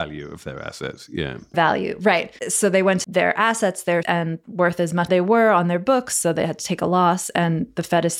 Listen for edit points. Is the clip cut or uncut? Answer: cut